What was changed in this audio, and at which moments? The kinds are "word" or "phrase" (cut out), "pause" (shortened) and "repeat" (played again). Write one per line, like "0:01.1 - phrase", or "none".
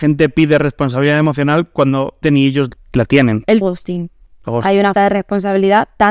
0:02.2 - word
0:02.8 - word
0:03.6 - word
0:05.0 - word